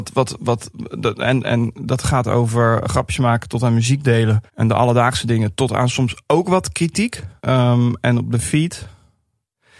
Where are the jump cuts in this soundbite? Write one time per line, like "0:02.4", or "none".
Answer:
0:01.4
0:02.8
0:04.5
0:07.4